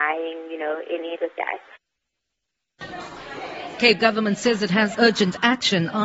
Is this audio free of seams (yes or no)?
no